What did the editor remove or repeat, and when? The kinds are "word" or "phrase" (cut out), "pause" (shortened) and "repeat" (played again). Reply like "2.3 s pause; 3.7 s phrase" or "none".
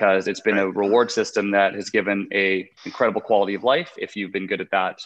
2.8 s pause

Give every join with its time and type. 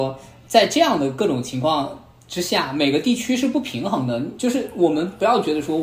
none

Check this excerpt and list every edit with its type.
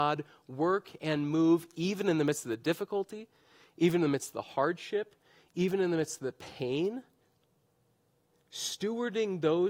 none

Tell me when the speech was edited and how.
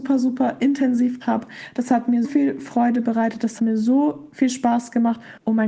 1.2 s word; 2.2 s word; 3.6 s word

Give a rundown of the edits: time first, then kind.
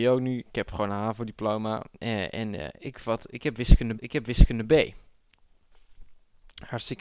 4.0 s repeat

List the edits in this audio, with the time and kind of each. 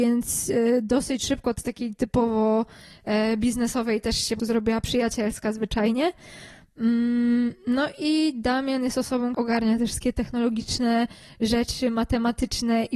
1.6 s word; 4.4 s word; 9.3 s word

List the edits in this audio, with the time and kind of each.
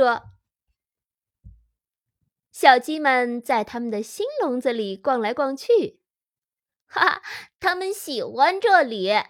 7.5 s pause

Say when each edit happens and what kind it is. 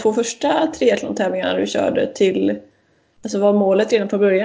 none

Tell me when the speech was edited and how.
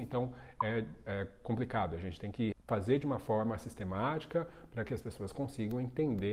2.5 s word

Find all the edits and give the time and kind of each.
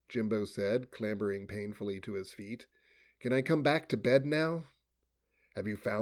none

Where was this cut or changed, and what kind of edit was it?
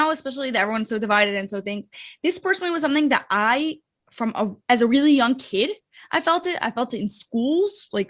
none

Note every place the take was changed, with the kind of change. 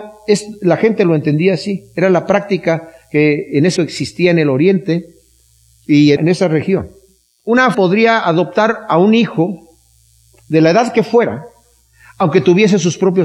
3.8 s word; 6.2 s word; 7.7 s word

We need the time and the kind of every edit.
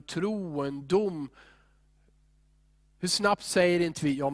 none

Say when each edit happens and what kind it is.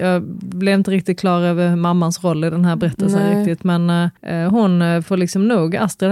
4.2 s pause

